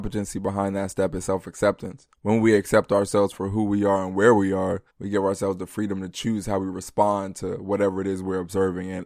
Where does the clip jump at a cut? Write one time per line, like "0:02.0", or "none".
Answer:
0:02.1
0:04.9